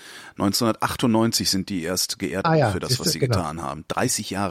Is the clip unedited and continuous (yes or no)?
no